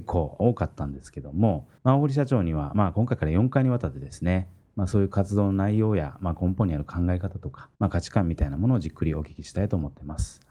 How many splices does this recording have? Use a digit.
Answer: 2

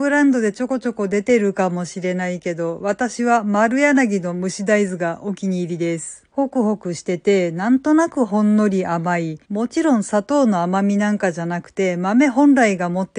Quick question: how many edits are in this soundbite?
2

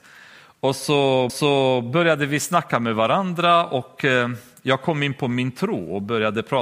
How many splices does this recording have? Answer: 1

